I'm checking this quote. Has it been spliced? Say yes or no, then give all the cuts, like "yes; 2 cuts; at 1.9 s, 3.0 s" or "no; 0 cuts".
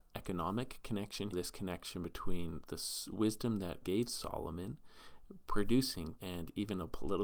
yes; 3 cuts; at 1.3 s, 3.8 s, 6.2 s